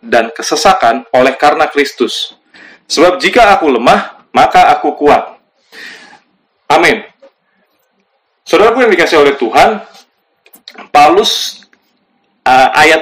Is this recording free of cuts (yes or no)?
yes